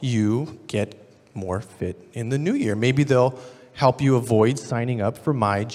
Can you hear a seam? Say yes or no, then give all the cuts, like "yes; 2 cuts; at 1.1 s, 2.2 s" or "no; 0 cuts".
no; 0 cuts